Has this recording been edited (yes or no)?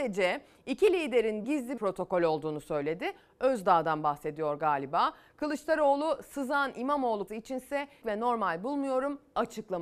yes